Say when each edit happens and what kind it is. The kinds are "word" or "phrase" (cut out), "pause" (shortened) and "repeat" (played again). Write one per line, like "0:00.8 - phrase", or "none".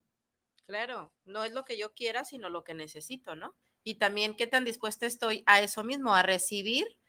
0:01.1 - pause
0:03.6 - pause